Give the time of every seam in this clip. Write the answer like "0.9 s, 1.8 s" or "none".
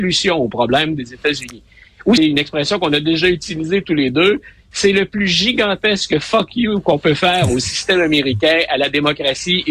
2.2 s